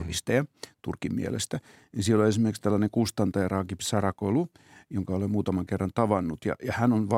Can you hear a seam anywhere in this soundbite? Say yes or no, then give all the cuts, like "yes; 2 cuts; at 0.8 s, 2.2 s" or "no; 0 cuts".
no; 0 cuts